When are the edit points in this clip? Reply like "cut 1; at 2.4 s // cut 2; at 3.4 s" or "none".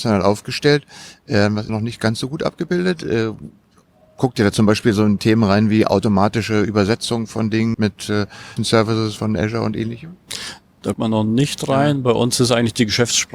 cut 1; at 1.7 s // cut 2; at 7.7 s // cut 3; at 8.6 s // cut 4; at 9.2 s // cut 5; at 10.9 s